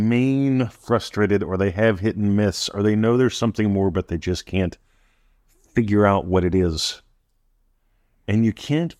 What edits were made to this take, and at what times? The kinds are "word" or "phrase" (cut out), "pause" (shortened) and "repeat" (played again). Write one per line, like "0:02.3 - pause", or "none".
none